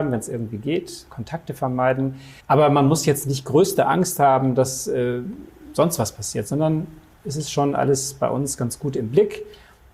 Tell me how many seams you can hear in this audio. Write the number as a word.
one